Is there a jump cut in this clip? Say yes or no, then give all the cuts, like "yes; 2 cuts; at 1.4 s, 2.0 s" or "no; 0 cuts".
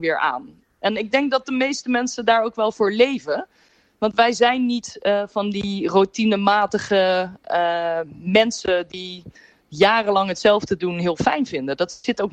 no; 0 cuts